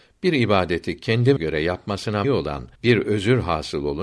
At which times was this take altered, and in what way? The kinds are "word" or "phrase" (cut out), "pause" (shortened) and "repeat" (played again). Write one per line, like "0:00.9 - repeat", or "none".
0:01.4 - word
0:02.2 - word
0:02.8 - pause